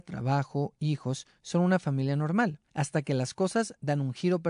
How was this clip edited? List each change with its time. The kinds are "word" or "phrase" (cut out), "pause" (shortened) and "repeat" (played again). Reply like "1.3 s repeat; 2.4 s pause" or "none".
2.7 s pause